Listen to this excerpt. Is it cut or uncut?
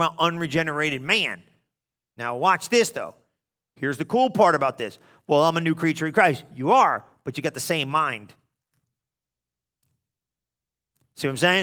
uncut